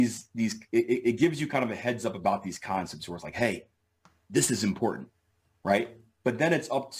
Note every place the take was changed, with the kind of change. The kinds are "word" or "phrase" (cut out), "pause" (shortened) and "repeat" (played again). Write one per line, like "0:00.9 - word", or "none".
none